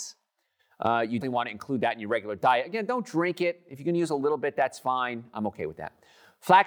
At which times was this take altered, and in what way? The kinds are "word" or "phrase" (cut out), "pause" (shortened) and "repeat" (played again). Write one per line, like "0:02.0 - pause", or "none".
0:01.2 - word